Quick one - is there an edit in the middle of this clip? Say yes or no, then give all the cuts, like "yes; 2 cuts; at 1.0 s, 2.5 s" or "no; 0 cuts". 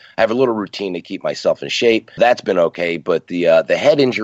yes; 2 cuts; at 1.2 s, 2.2 s